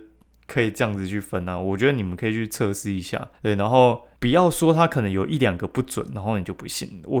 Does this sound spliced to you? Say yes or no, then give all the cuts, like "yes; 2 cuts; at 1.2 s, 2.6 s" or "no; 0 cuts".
yes; 2 cuts; at 3.3 s, 4.2 s